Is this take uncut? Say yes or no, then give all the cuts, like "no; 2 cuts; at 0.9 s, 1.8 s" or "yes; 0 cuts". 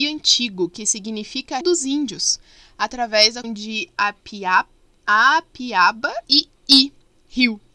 no; 3 cuts; at 1.6 s, 3.4 s, 6.2 s